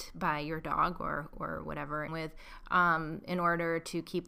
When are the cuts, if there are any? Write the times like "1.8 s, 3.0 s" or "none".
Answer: 2.1 s